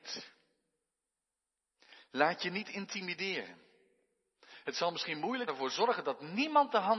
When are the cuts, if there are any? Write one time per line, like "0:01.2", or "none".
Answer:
0:05.5